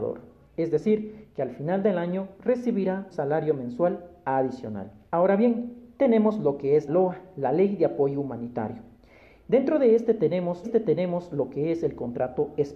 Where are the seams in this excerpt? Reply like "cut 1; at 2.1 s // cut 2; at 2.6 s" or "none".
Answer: cut 1; at 3.1 s // cut 2; at 5.1 s // cut 3; at 6.9 s // cut 4; at 10.6 s